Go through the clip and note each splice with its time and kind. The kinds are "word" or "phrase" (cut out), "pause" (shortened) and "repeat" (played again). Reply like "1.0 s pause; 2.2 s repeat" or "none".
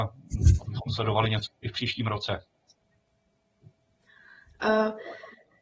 1.5 s word